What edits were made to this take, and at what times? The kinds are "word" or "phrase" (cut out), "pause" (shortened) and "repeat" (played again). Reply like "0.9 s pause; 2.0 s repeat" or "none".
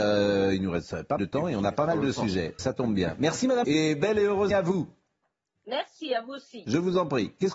1.2 s word; 2.6 s word; 3.6 s word; 4.5 s word